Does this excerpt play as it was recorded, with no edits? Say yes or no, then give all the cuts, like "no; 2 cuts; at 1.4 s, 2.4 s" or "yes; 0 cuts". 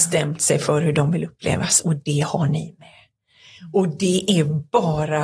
yes; 0 cuts